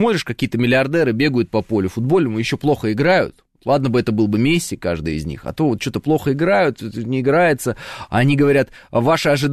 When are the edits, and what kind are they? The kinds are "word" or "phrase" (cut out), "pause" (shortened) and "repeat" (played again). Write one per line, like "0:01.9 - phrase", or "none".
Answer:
none

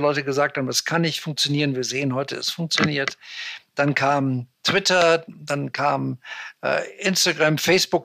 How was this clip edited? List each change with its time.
none

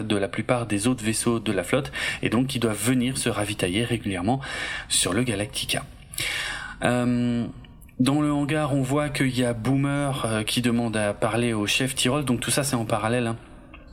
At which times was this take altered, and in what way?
none

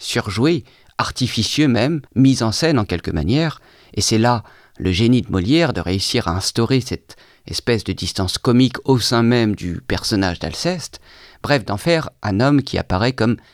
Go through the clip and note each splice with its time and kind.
0:02.1 - pause

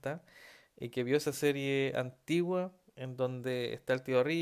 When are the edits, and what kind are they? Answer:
none

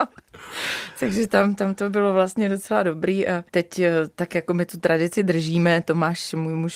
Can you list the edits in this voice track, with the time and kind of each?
0:03.5 - pause

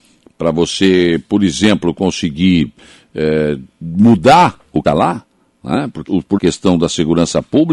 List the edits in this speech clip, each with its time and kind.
0:04.8 - word
0:06.1 - word
0:06.4 - phrase

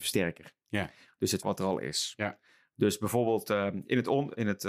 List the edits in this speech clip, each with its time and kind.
0:01.4 - phrase

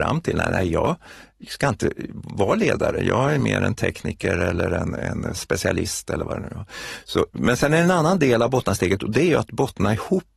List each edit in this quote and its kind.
none

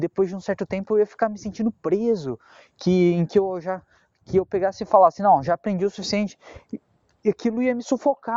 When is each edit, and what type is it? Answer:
none

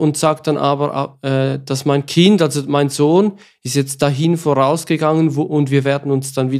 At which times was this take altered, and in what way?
none

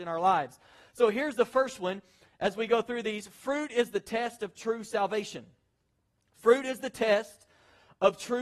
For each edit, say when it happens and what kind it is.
none

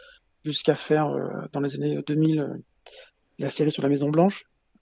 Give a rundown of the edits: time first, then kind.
none

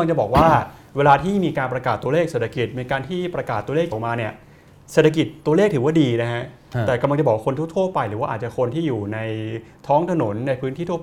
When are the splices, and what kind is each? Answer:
0:03.9 - word

